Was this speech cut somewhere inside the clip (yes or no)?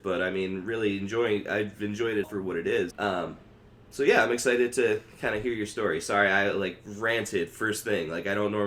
yes